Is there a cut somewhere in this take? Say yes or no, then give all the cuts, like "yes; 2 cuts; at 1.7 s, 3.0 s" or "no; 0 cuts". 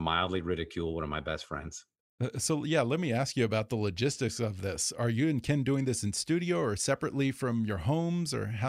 no; 0 cuts